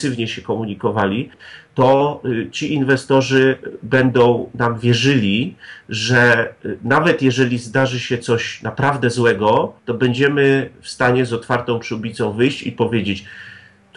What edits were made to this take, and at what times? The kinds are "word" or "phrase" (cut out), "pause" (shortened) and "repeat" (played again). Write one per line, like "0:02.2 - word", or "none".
0:09.8 - pause